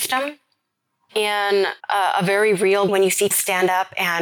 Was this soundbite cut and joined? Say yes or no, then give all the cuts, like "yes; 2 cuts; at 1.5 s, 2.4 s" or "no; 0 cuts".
yes; 3 cuts; at 1.8 s, 2.9 s, 3.3 s